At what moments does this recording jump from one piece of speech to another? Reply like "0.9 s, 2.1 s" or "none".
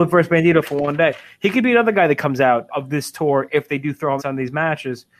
2.7 s, 4.2 s